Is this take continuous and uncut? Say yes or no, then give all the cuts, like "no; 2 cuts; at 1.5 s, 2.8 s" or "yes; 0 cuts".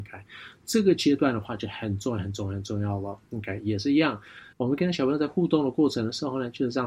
no; 1 cut; at 4.5 s